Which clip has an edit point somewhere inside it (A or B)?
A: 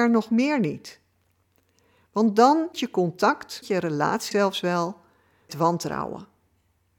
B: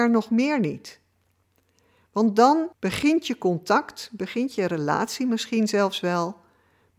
A